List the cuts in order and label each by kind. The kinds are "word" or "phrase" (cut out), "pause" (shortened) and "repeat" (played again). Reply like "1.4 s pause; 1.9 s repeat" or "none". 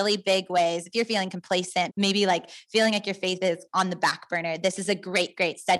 1.9 s word